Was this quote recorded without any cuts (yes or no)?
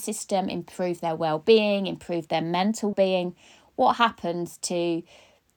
no